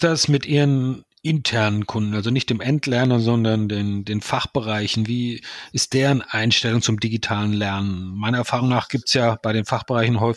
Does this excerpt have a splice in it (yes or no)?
yes